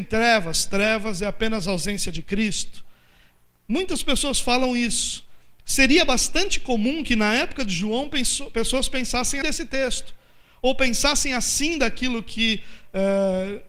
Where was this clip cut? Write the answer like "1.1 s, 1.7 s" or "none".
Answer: 9.4 s